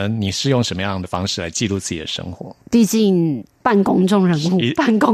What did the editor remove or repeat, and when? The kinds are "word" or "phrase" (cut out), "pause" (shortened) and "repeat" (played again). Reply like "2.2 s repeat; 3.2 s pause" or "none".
2.6 s pause